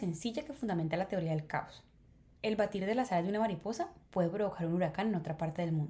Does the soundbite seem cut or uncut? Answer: uncut